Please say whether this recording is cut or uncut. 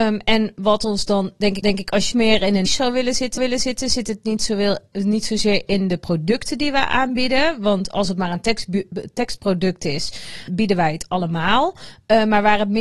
cut